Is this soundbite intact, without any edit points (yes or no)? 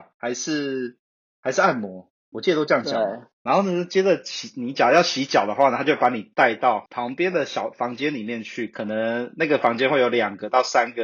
yes